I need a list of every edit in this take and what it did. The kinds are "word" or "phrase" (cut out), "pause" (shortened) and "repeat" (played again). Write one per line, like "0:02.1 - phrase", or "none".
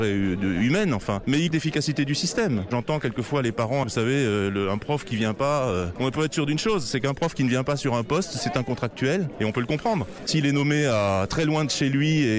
0:01.5 - word
0:03.8 - word